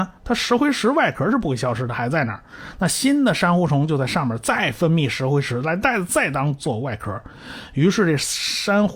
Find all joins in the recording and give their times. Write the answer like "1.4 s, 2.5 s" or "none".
none